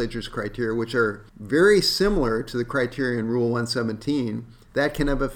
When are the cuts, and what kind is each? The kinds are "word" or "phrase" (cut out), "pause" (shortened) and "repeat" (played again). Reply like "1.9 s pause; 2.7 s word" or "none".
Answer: 1.3 s pause